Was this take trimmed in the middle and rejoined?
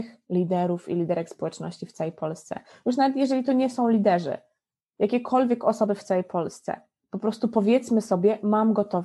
no; 0 cuts

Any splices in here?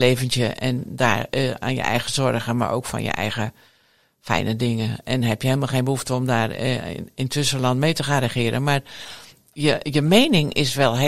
no; 0 cuts

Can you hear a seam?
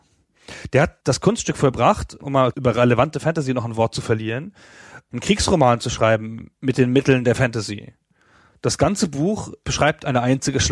no; 0 cuts

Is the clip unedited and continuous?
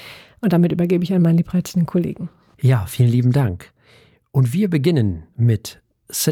yes; 0 cuts

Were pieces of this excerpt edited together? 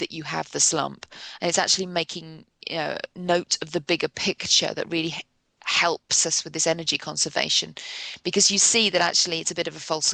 no; 0 cuts

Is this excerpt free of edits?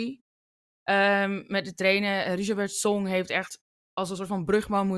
yes; 0 cuts

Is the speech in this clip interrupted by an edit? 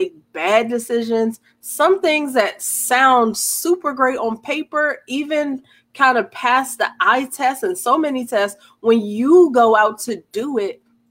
no; 0 cuts

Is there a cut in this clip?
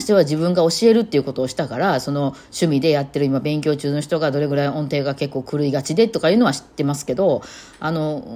no; 0 cuts

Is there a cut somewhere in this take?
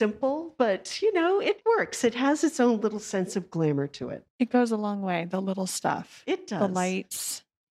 yes; 1 cut; at 4.3 s

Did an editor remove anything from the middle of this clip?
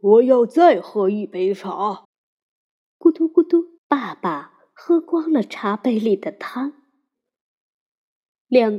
yes; 2 cuts; at 2.0 s, 3.8 s

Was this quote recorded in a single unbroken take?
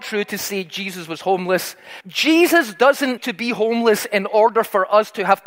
no; 2 cuts; at 2.0 s, 3.2 s

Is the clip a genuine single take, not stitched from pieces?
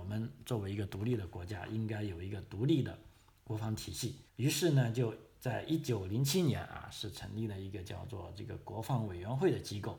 no; 1 cut; at 4.3 s

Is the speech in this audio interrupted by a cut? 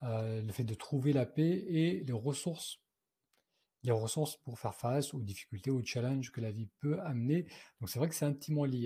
no; 0 cuts

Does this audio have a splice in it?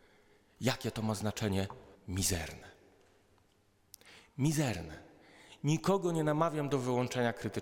yes; 1 cut; at 1.9 s

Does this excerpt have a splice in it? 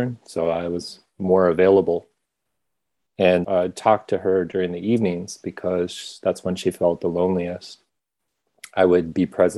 yes; 1 cut; at 3.4 s

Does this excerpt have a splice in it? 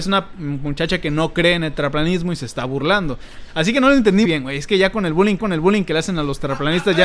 yes; 2 cuts; at 4.2 s, 5.4 s

